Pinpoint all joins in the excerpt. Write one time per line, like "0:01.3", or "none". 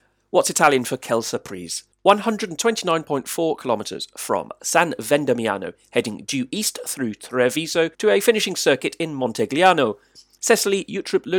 0:01.9
0:07.9